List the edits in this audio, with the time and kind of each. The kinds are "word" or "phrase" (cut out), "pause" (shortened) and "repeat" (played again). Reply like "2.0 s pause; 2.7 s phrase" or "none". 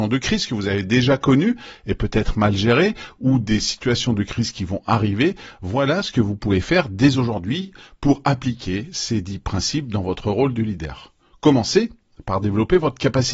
none